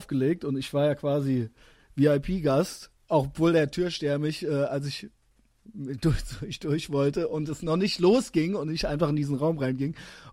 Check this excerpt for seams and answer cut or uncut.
uncut